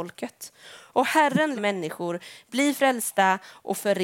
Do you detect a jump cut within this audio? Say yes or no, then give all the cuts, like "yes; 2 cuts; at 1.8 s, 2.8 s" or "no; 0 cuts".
yes; 1 cut; at 1.6 s